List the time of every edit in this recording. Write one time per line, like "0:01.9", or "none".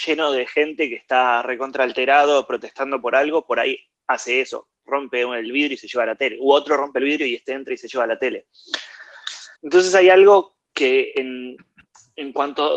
0:09.6